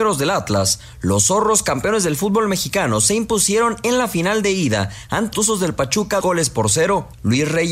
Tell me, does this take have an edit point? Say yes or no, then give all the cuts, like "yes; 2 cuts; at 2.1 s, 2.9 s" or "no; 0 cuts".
yes; 2 cuts; at 5.3 s, 6.2 s